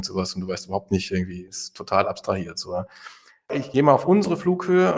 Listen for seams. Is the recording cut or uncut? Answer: uncut